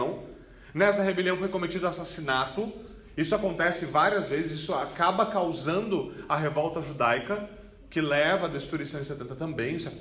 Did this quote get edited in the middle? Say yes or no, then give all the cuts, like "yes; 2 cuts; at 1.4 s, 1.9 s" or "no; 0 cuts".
no; 0 cuts